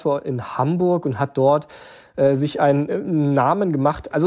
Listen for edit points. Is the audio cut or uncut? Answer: uncut